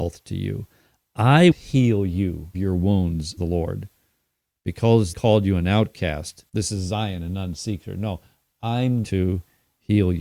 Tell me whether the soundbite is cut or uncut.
cut